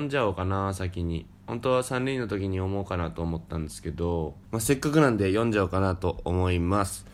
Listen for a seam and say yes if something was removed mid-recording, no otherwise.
yes